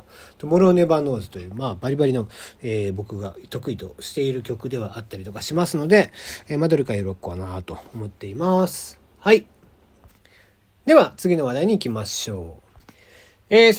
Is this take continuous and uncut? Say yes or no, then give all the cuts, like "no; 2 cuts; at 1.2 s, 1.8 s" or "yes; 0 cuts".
yes; 0 cuts